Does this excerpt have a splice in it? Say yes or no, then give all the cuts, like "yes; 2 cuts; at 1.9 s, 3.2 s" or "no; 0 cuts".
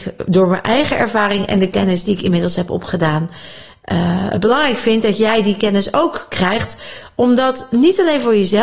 no; 0 cuts